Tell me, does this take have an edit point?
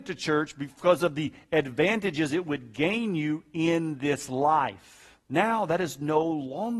yes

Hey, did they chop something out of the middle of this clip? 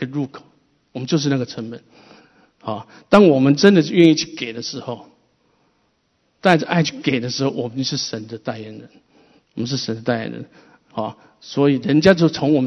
no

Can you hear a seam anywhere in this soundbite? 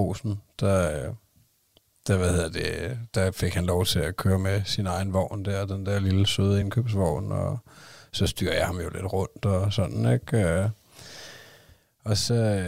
no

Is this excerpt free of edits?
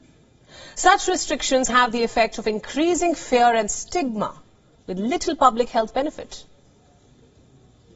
no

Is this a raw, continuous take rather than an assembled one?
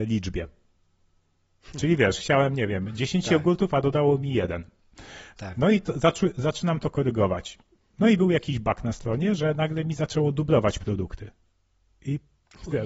yes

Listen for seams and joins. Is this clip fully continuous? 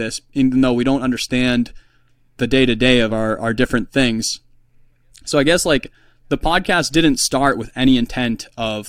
yes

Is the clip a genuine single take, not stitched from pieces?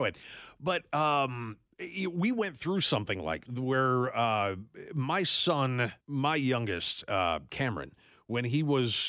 no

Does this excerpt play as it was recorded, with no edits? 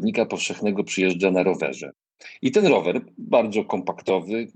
yes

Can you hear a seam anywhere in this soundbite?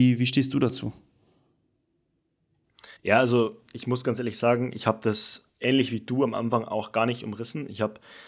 yes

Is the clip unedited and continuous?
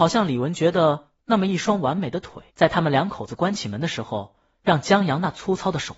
no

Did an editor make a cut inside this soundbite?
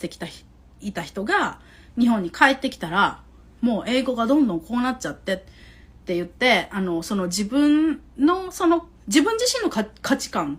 yes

